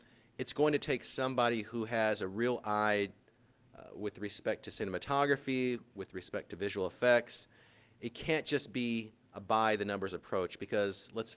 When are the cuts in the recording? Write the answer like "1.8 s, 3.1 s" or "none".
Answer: none